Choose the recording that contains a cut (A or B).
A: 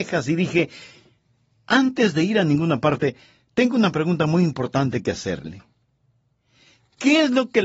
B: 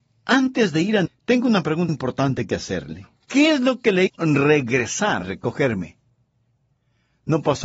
B